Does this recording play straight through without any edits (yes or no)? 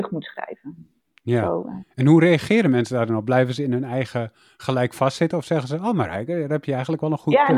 no